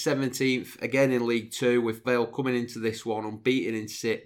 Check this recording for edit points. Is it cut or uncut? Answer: cut